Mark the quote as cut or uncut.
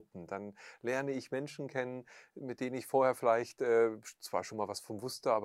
uncut